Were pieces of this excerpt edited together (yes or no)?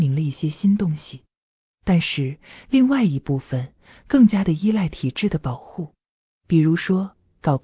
no